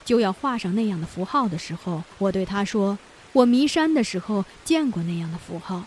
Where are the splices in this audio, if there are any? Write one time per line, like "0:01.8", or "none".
0:02.1